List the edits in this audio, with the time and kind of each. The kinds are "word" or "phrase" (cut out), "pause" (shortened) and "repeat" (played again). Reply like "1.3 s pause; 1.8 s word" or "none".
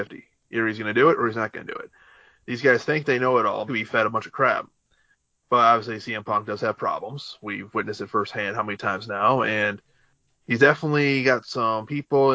3.7 s phrase